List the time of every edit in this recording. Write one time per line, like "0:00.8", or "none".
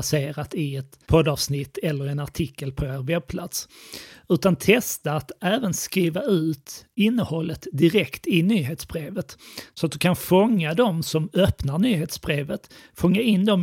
0:01.0